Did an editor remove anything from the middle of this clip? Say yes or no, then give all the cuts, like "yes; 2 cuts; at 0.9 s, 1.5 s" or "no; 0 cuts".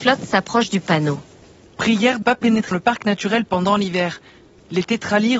yes; 2 cuts; at 2.2 s, 2.7 s